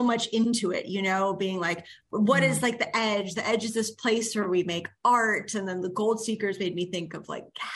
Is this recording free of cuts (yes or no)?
yes